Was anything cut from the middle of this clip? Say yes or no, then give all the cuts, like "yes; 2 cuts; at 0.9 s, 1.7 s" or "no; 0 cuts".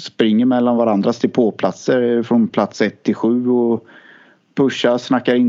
no; 0 cuts